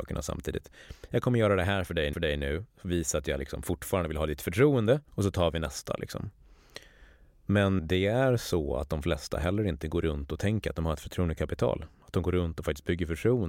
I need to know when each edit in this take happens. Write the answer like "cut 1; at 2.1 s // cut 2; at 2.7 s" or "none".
cut 1; at 2.1 s // cut 2; at 5.1 s // cut 3; at 7.8 s